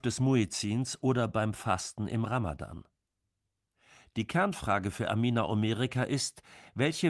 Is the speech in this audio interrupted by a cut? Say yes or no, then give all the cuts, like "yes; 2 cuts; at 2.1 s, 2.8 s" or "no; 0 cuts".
no; 0 cuts